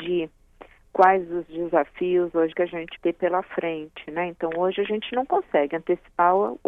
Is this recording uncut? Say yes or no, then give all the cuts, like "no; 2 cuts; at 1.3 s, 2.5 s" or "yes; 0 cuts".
no; 2 cuts; at 2.5 s, 3.0 s